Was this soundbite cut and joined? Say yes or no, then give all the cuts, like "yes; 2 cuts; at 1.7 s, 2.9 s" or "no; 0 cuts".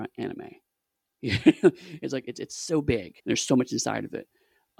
yes; 1 cut; at 3.2 s